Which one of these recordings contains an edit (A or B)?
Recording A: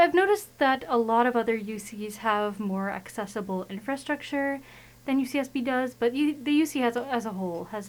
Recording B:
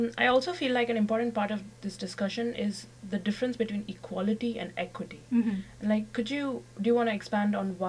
B